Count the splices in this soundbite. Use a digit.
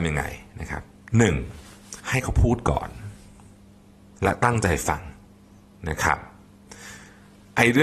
1